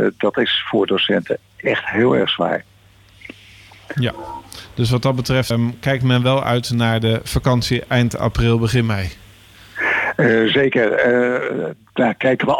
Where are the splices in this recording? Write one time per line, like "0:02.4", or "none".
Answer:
0:05.5